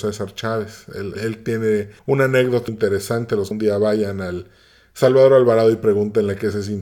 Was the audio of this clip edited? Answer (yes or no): yes